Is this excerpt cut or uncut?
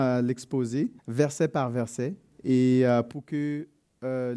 cut